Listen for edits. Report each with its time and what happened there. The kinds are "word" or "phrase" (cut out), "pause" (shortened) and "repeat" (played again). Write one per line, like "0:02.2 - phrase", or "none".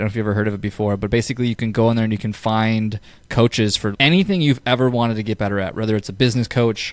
0:03.9 - word